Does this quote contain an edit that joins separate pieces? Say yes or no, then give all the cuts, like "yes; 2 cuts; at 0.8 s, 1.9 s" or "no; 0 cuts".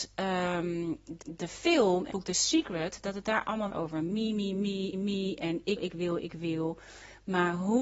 yes; 5 cuts; at 1.2 s, 2.1 s, 3.7 s, 4.9 s, 5.8 s